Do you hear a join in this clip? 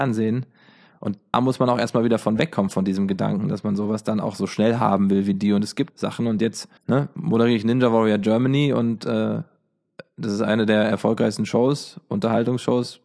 yes; 3 cuts; at 1.3 s, 5.9 s, 6.8 s

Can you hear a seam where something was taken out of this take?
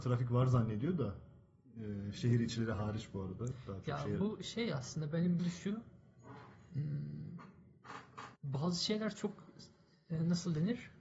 yes; 2 cuts; at 5.4 s, 8.4 s

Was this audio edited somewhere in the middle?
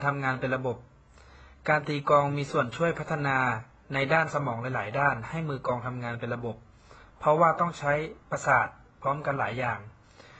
yes; 1 cut; at 8.2 s

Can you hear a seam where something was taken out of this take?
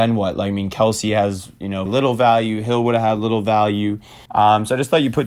yes; 2 cuts; at 1.9 s, 4.3 s

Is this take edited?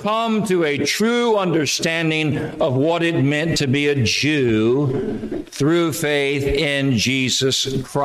no; 0 cuts

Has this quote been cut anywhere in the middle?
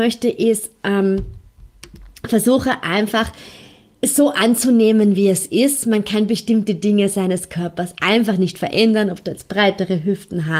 no; 0 cuts

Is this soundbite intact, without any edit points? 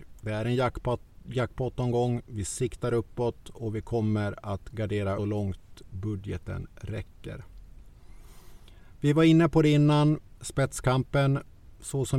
no; 1 cut; at 5.2 s

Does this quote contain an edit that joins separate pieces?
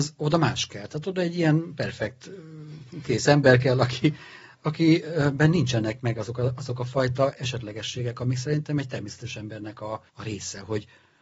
yes; 1 cut; at 10.1 s

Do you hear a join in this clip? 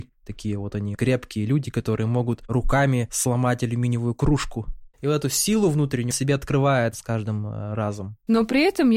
yes; 3 cuts; at 0.9 s, 4.9 s, 6.1 s

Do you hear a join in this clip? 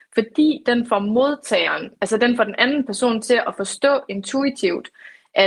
no; 0 cuts

